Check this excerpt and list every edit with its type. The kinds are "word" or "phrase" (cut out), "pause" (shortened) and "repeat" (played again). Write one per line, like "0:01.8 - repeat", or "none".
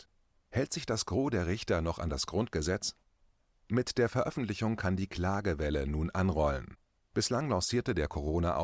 none